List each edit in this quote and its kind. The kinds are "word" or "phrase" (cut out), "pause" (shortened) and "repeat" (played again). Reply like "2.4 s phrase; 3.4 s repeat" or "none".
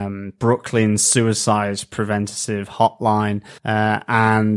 3.6 s pause